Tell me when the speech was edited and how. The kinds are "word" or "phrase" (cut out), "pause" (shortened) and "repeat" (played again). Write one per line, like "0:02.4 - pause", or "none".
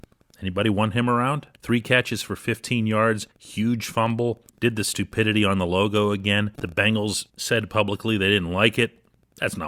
0:01.5 - pause
0:03.3 - pause
0:04.5 - pause
0:06.5 - pause
0:07.3 - pause